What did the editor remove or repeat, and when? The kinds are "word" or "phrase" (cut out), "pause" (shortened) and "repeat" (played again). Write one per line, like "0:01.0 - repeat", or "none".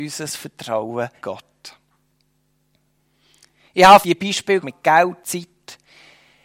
0:01.2 - word
0:04.0 - word
0:04.6 - word
0:05.2 - word